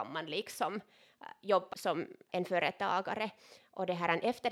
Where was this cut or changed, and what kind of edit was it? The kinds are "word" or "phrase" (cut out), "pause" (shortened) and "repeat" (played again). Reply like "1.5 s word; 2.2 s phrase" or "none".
1.7 s word; 2.3 s word